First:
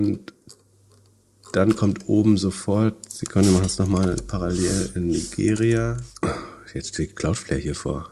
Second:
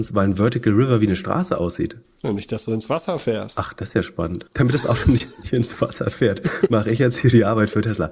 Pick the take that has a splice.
second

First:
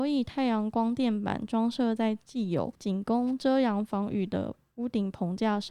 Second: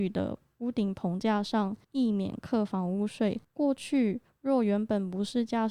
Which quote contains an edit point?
second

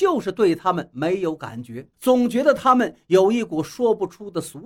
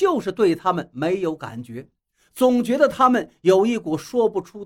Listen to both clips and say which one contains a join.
first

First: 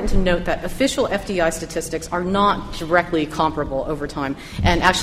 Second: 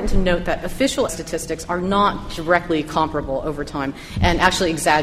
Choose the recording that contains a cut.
second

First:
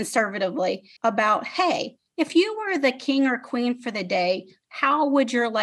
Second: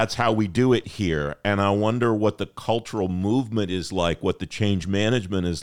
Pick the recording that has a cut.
first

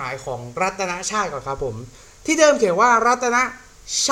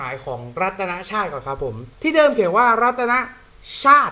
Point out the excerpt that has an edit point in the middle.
second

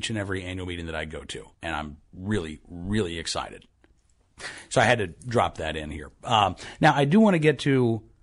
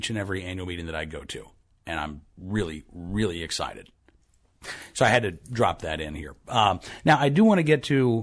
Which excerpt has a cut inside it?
first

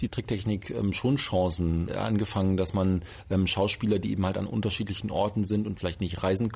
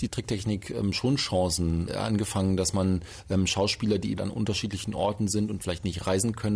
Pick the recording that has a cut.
second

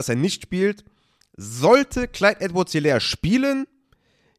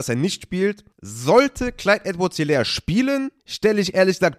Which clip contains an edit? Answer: second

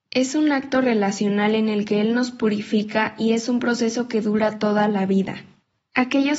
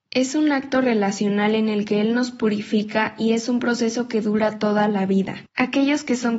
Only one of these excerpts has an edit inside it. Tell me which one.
second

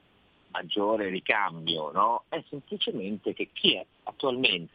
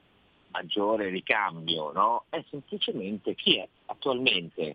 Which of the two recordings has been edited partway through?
second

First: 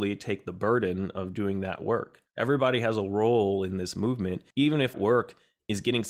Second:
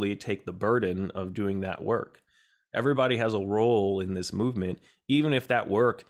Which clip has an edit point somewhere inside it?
first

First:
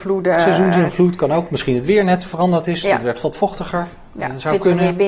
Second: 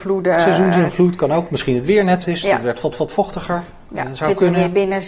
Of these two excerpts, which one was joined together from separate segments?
second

